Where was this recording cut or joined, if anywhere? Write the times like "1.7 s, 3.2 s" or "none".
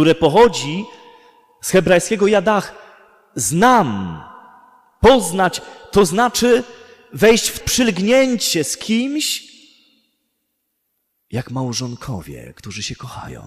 7.6 s